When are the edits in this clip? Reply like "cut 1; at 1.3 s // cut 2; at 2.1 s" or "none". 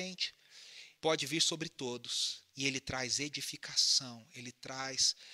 cut 1; at 1.0 s // cut 2; at 2.5 s